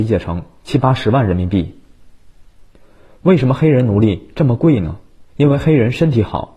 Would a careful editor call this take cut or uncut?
cut